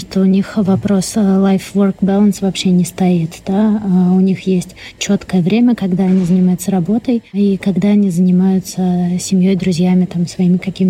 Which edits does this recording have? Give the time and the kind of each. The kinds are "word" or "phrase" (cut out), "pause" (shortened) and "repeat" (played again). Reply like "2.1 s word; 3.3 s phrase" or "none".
none